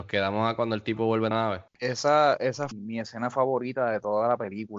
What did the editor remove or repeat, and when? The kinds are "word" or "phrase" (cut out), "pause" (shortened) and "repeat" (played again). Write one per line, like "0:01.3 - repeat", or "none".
0:01.3 - phrase
0:01.7 - pause
0:02.7 - phrase